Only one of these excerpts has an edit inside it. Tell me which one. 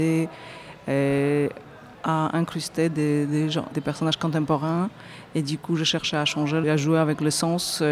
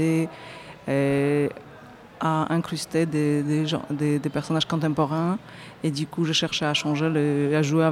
first; 3 cuts; at 1.9 s, 3.7 s, 6.6 s

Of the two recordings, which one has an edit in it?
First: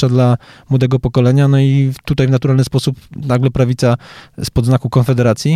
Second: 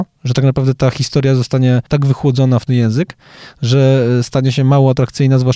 second; 2 cuts; at 1.9 s, 2.7 s

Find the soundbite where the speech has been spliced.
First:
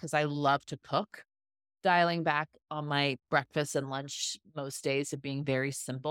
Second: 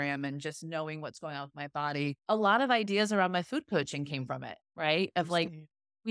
second; 2 cuts; at 2.2 s, 4.6 s

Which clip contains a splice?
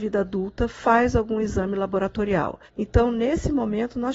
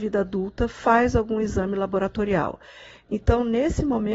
first; 1 cut; at 2.7 s

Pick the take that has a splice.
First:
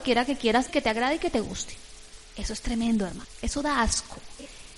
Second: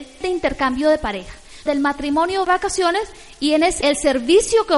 second; 3 cuts; at 1.7 s, 2.4 s, 3.8 s

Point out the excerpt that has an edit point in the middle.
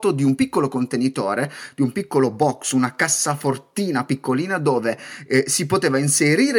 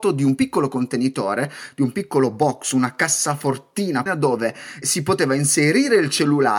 second; 2 cuts; at 4.1 s, 4.8 s

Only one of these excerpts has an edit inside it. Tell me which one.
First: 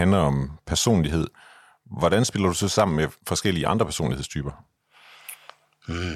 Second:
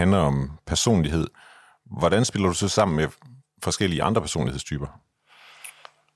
first; 1 cut; at 3.2 s

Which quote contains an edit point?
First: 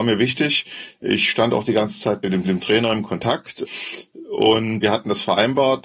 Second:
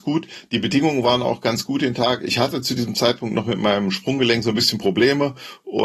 first; 2 cuts; at 2.4 s, 4.8 s

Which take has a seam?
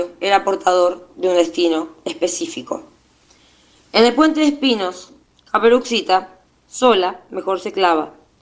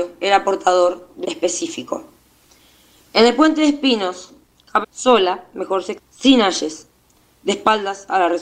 second; 3 cuts; at 1.2 s, 4.8 s, 6.0 s

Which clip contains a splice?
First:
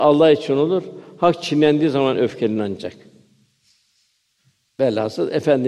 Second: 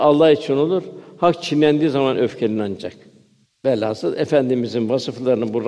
second; 1 cut; at 3.4 s

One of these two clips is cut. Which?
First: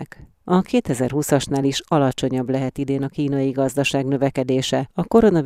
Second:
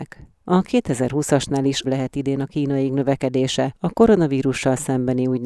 second; 2 cuts; at 1.8 s, 2.9 s

